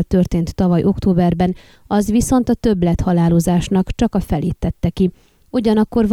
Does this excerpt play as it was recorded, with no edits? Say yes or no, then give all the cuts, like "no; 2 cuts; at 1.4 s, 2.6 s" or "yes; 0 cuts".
yes; 0 cuts